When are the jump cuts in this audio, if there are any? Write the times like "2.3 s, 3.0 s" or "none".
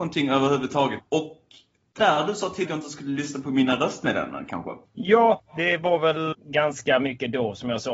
2.0 s, 2.7 s, 4.8 s, 6.3 s